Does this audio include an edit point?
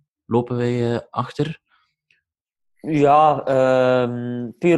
no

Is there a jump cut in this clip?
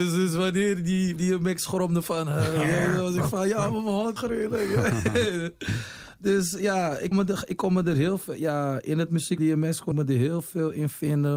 yes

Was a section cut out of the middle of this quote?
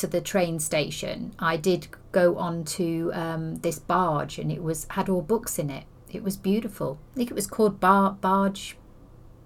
yes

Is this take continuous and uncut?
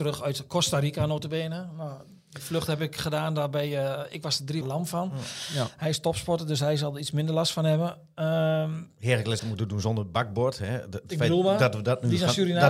no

